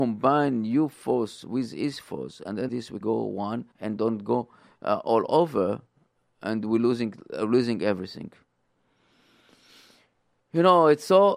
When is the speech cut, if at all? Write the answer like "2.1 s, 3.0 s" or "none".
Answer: 2.7 s, 3.0 s, 3.7 s

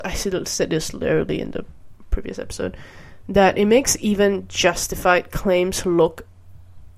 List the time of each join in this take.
none

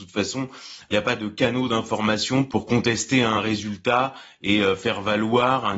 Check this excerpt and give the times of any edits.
none

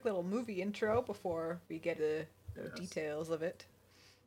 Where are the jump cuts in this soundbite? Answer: 1.6 s, 2.0 s, 2.5 s

